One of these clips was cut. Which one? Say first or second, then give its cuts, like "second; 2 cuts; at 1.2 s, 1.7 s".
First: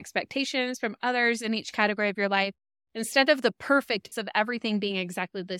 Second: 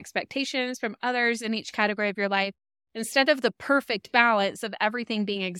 first; 1 cut; at 4.1 s